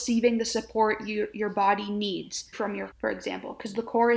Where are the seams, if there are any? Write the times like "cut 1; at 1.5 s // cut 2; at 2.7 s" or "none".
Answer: cut 1; at 2.5 s // cut 2; at 2.9 s